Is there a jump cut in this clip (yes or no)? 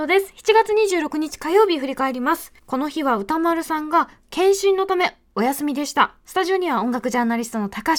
yes